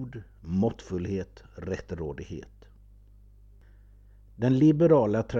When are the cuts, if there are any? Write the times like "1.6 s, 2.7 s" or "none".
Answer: none